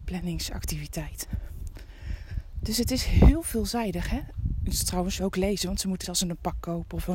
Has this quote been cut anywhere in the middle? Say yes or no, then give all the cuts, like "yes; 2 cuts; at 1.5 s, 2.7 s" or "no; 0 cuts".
yes; 2 cuts; at 5.2 s, 6.0 s